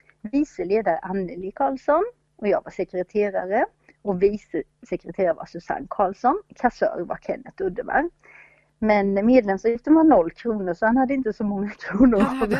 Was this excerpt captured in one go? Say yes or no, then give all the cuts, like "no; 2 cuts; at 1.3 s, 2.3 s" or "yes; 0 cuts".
yes; 0 cuts